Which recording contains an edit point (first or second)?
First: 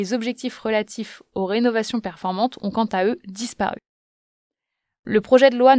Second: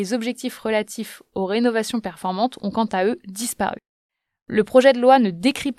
second